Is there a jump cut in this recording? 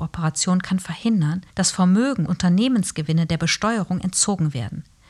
yes; 2 cuts; at 1.5 s, 2.3 s

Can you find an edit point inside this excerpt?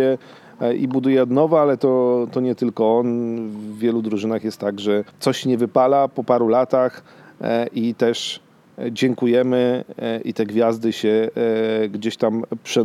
yes; 1 cut; at 5.1 s

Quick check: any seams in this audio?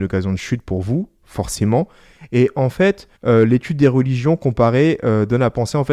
yes; 1 cut; at 3.2 s

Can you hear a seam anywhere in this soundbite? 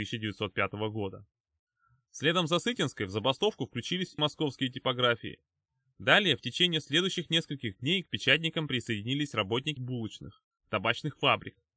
yes; 2 cuts; at 4.2 s, 9.8 s

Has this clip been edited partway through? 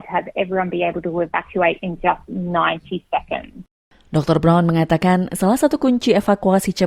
no; 0 cuts

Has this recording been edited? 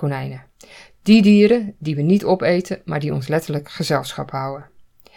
no; 0 cuts

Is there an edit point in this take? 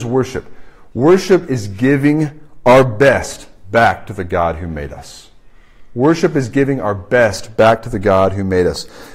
no; 0 cuts

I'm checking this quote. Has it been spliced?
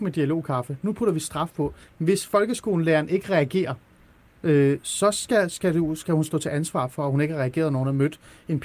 no; 0 cuts

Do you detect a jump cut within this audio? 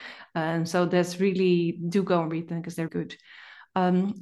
yes; 1 cut; at 2.9 s

